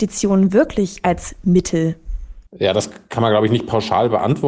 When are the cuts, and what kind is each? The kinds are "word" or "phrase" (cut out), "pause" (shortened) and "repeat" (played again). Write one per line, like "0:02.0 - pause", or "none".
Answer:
0:02.5 - pause